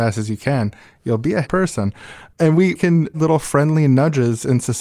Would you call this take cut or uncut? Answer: cut